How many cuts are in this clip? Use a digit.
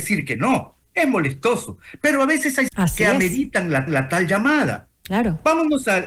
2